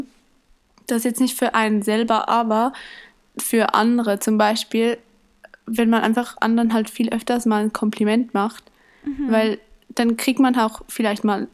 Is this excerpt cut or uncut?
uncut